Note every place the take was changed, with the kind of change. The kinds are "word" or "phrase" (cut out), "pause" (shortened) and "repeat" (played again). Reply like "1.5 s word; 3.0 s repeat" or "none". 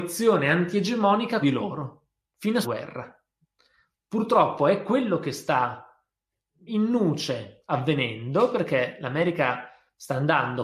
1.4 s word; 2.2 s pause; 2.6 s phrase; 6.7 s word